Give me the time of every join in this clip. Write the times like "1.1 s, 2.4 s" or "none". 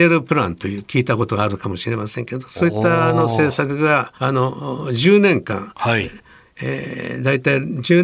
4.2 s